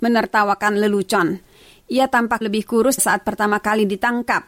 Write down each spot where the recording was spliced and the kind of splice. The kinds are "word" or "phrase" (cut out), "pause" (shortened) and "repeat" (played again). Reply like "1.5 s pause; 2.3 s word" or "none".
2.4 s word; 3.0 s word